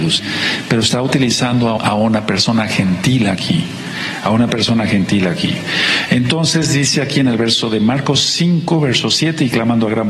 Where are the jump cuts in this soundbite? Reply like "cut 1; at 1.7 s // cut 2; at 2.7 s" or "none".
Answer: cut 1; at 1.8 s